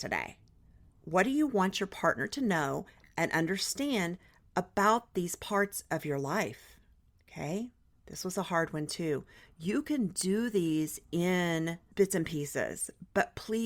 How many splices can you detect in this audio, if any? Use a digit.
0